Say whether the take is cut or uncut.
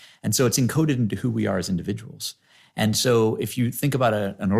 uncut